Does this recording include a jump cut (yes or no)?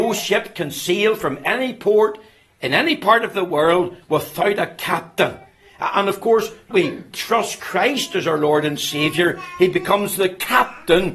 yes